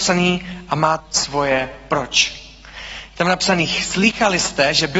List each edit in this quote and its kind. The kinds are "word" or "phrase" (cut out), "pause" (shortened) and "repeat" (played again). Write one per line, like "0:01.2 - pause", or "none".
0:01.0 - word